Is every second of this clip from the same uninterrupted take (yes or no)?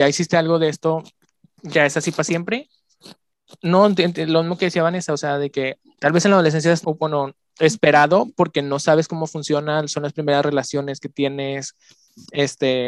no